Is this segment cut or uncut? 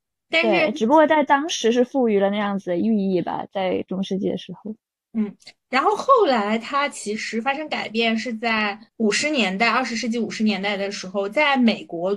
uncut